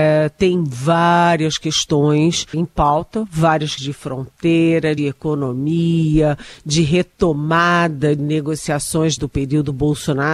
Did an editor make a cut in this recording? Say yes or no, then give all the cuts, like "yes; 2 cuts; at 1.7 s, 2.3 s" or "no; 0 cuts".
yes; 5 cuts; at 2.5 s, 3.8 s, 5.0 s, 8.2 s, 9.2 s